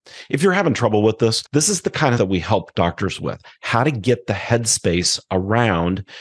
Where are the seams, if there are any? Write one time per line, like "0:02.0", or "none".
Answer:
0:01.5
0:02.2